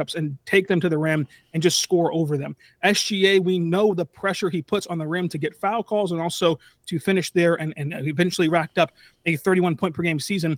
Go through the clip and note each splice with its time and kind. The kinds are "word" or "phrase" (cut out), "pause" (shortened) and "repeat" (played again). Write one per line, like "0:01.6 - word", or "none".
none